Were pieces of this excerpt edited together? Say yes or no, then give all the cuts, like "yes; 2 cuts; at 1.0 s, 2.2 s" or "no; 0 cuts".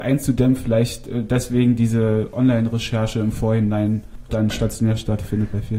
yes; 1 cut; at 4.3 s